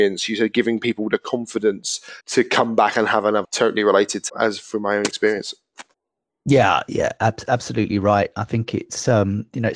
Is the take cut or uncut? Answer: cut